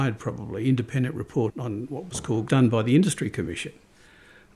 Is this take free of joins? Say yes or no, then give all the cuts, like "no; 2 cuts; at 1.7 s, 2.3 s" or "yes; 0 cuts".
no; 2 cuts; at 1.5 s, 2.5 s